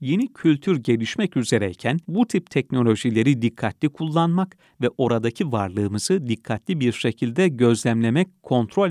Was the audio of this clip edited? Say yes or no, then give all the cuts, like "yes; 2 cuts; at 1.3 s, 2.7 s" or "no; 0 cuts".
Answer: yes; 1 cut; at 2.0 s